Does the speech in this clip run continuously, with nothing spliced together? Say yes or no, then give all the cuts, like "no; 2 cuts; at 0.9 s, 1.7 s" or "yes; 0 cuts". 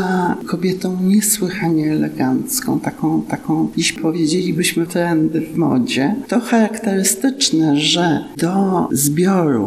no; 2 cuts; at 3.3 s, 4.9 s